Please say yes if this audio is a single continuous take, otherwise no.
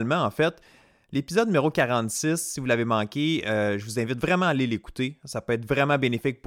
yes